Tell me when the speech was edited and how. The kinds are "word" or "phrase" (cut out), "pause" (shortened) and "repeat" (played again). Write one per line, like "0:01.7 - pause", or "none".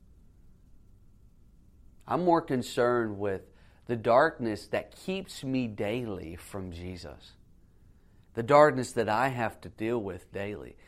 none

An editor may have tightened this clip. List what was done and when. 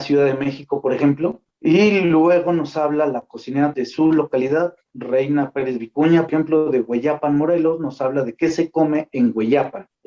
0:01.5 - pause
0:03.7 - word
0:06.3 - word

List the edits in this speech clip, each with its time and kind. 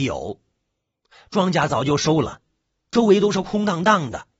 none

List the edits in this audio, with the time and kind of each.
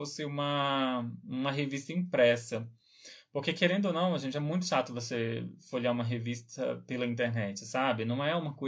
none

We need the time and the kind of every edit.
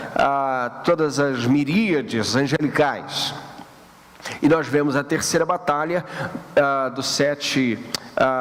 none

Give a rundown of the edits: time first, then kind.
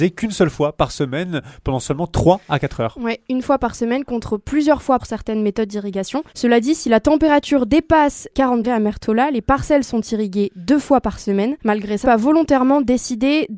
0:05.0 - phrase
0:06.3 - pause
0:08.3 - word
0:08.6 - word
0:11.6 - pause
0:12.0 - phrase

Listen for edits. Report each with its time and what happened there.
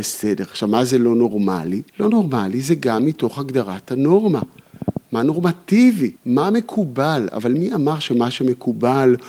0:01.9 - pause
0:06.2 - pause

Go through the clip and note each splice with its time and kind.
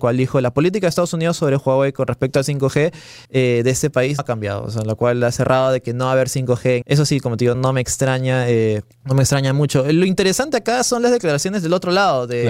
0:03.2 - pause
0:04.2 - word
0:06.8 - phrase
0:07.5 - word
0:08.9 - pause

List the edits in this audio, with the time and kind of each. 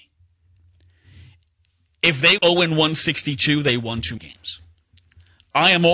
0:02.4 - word
0:04.2 - word

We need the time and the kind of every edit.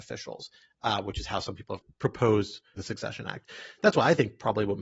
0:02.8 - word

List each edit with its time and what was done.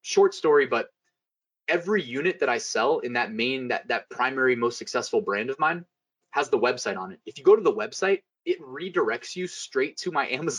0:08.3 - pause

